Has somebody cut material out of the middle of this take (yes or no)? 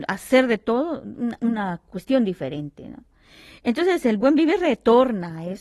no